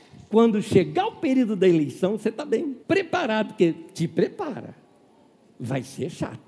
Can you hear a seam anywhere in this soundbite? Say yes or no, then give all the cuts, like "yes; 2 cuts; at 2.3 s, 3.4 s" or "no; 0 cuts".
yes; 1 cut; at 2.8 s